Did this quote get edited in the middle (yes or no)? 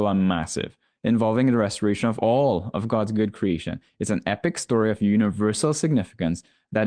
no